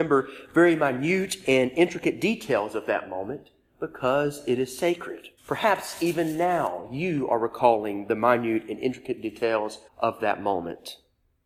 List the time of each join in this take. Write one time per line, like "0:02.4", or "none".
0:05.4
0:09.9